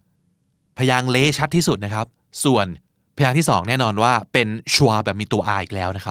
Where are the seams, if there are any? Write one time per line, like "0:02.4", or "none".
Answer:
none